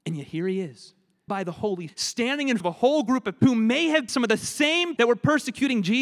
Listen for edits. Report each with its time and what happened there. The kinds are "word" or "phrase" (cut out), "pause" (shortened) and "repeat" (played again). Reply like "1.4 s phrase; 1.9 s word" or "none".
1.3 s word; 1.9 s word; 2.6 s word; 3.4 s word; 4.1 s word; 5.0 s word